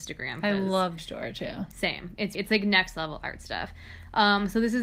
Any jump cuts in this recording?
yes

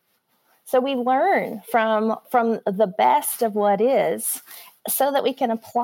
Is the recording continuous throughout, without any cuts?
yes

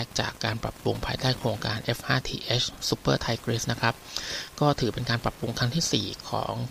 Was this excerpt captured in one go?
yes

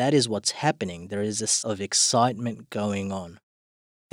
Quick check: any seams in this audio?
yes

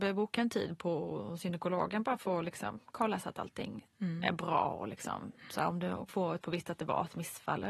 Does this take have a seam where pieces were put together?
yes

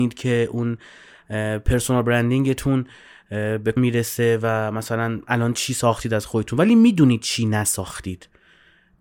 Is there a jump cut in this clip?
yes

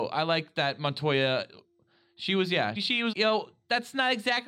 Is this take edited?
yes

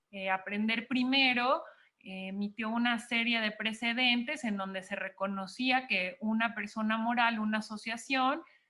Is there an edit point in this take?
no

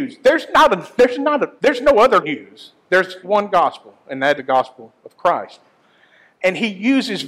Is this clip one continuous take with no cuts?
no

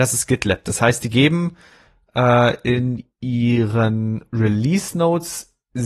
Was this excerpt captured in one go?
yes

